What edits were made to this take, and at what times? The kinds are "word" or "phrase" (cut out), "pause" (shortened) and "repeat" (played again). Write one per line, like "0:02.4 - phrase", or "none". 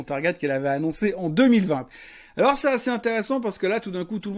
none